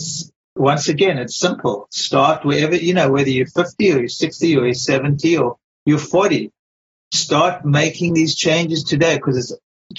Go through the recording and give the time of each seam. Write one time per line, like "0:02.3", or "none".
none